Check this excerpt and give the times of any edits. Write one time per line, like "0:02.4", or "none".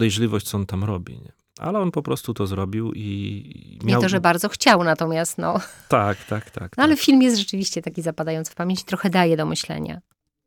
none